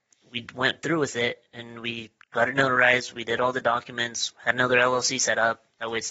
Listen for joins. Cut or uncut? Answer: uncut